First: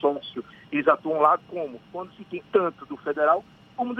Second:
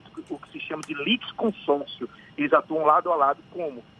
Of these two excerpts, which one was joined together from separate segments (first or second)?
first